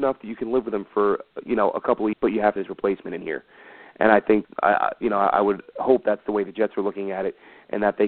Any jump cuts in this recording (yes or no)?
yes